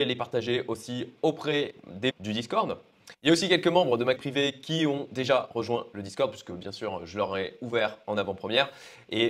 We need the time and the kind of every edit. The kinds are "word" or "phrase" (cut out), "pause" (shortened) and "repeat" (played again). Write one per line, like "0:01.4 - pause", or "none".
0:02.1 - word
0:04.2 - word